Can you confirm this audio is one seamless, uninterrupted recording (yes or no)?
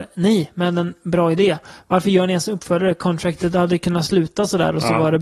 yes